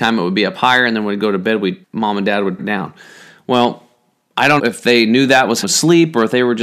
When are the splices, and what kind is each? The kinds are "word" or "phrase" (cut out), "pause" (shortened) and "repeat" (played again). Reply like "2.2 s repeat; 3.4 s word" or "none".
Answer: 1.8 s word; 2.6 s word; 4.6 s word; 5.6 s word

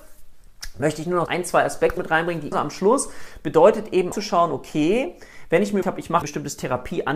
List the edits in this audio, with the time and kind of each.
1.3 s word; 2.0 s word; 2.5 s word; 4.1 s word; 5.8 s word; 6.2 s word

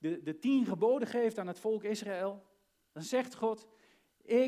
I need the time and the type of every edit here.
none

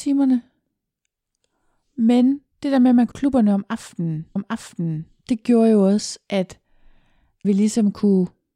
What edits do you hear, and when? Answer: 2.5 s pause; 3.1 s phrase; 4.4 s repeat; 7.4 s word

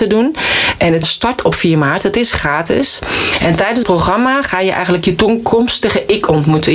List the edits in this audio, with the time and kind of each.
1.0 s word; 3.8 s word

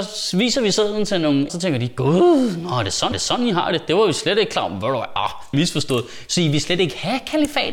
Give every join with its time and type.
1.5 s phrase; 3.1 s repeat; 5.5 s phrase

